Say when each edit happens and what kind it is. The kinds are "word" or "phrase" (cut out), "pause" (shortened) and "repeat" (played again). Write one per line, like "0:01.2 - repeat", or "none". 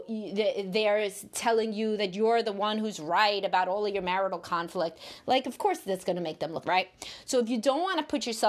0:06.6 - word